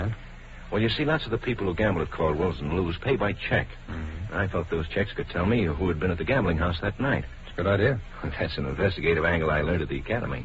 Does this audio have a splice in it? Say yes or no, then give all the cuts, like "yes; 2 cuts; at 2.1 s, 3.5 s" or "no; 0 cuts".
no; 0 cuts